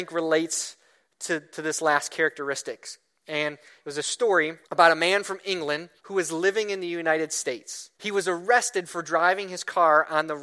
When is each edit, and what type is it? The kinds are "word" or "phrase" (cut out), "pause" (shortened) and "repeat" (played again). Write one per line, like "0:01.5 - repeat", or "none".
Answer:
0:04.6 - pause
0:06.0 - pause
0:07.9 - pause